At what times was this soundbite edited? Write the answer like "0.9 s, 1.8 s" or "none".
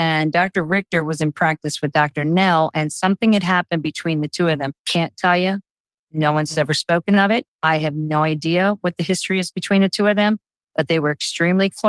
4.8 s, 7.5 s